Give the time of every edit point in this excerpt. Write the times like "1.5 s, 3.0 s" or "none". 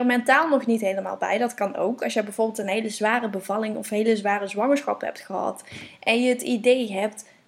none

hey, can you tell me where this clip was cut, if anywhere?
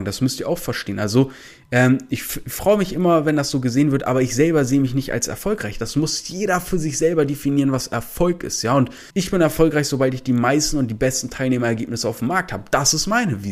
9.1 s

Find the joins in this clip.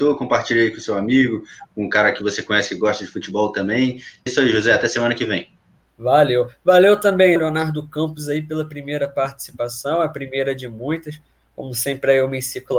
4.3 s, 7.4 s

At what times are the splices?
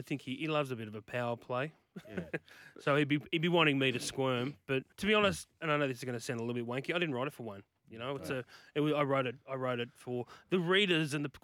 4.9 s, 5.5 s, 9.4 s

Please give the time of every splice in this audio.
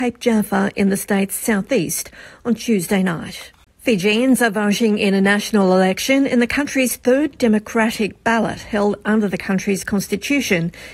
none

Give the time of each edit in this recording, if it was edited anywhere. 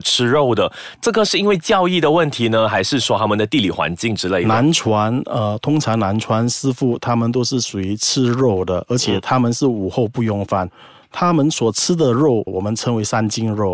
12.5 s

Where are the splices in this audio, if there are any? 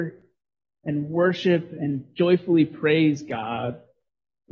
none

